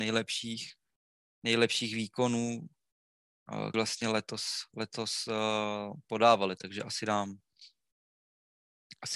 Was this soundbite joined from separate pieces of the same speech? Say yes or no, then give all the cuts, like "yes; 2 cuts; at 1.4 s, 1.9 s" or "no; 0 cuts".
yes; 1 cut; at 3.7 s